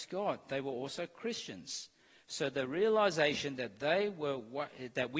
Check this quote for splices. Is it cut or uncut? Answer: uncut